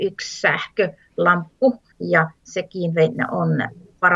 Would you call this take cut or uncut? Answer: cut